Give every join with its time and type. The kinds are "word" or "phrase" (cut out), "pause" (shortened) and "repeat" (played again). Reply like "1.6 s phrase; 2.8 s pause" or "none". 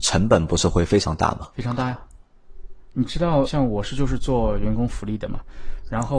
3.4 s word

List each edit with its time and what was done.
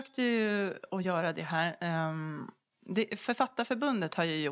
none

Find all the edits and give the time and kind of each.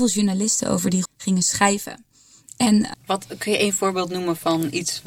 1.1 s word; 2.9 s word

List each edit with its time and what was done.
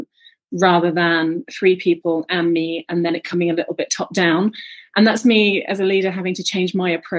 none

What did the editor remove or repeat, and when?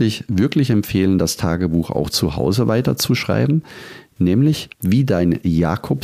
4.7 s pause

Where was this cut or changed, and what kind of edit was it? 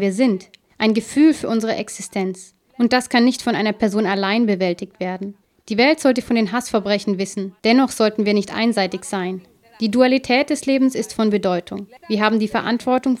7.6 s pause; 12.0 s pause

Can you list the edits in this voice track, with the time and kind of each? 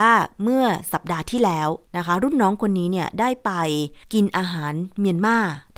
1.9 s pause; 4.0 s pause

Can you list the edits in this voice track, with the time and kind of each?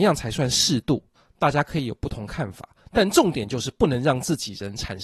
1.2 s pause

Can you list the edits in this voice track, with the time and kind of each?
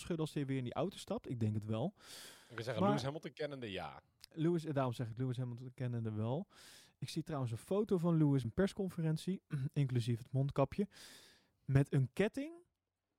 8.4 s word

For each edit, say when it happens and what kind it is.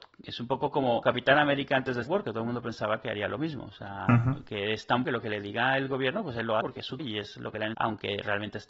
1.0 s word; 2.1 s word; 5.0 s word; 6.6 s word; 7.0 s word; 7.7 s word

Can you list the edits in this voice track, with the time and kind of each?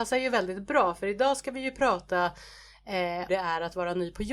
3.3 s phrase

